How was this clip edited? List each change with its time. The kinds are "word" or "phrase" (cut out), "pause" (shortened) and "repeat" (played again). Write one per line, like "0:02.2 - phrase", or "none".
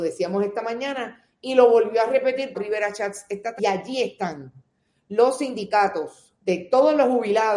0:02.5 - word
0:03.6 - word
0:06.3 - pause